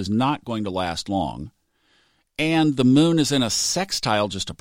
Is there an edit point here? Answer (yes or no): no